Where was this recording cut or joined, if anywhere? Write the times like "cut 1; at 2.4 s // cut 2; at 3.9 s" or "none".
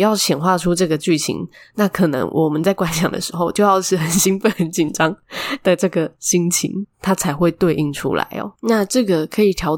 cut 1; at 6.2 s // cut 2; at 8.6 s